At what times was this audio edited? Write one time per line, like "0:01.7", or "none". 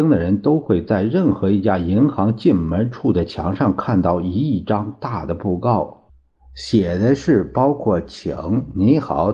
none